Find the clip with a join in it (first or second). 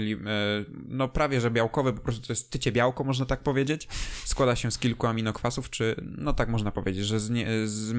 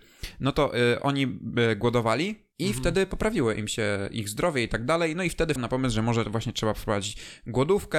second